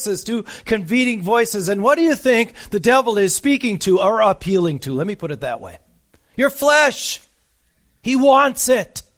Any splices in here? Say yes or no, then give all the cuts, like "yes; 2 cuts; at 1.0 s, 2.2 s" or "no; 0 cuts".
no; 0 cuts